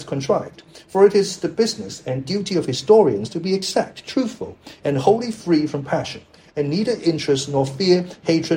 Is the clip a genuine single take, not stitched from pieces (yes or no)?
yes